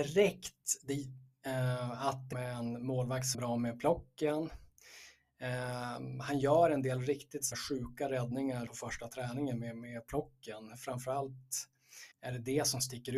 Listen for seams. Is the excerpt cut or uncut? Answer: cut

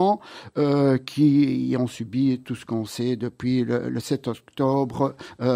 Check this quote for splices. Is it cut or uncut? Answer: uncut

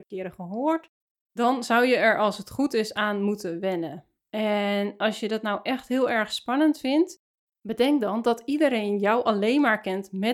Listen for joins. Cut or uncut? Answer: uncut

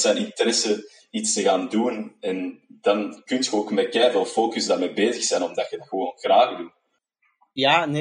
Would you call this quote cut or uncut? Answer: uncut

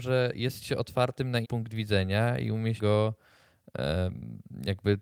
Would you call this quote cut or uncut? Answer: cut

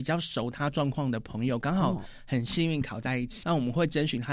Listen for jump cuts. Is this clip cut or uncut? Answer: cut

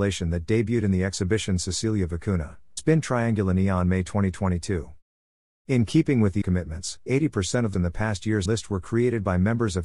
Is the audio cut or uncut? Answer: cut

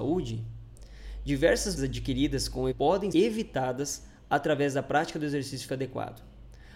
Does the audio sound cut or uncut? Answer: cut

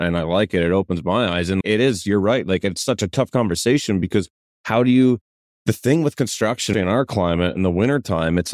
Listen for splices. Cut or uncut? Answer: cut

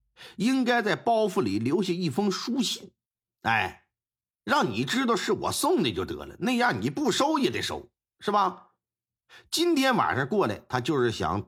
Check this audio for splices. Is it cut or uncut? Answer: uncut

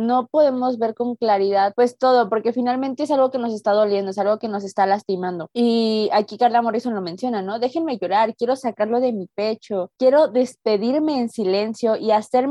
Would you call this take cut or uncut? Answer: uncut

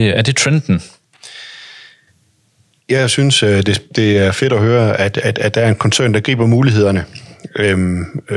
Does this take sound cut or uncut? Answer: uncut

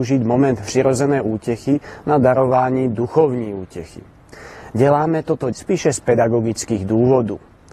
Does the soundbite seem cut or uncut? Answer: cut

